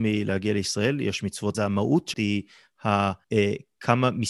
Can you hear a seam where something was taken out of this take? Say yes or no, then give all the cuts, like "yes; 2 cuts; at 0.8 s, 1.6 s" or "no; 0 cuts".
yes; 3 cuts; at 1.5 s, 2.1 s, 3.2 s